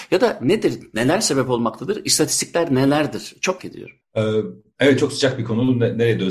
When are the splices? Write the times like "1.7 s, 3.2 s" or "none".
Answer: 3.6 s